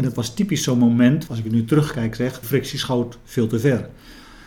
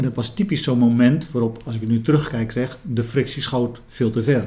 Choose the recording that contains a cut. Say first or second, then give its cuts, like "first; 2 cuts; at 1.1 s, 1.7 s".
first; 2 cuts; at 1.3 s, 2.4 s